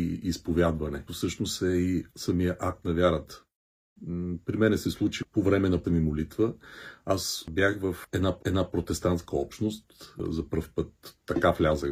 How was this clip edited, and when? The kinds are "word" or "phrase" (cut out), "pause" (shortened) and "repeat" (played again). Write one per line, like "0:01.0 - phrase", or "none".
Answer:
0:01.1 - word
0:02.1 - pause
0:05.8 - word
0:08.4 - repeat